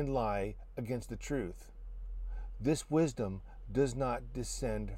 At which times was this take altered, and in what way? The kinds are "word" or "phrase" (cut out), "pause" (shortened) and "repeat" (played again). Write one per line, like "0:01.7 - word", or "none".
none